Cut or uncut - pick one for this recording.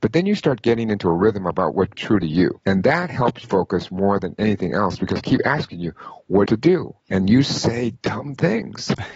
cut